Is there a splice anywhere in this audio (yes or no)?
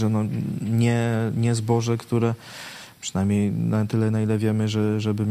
no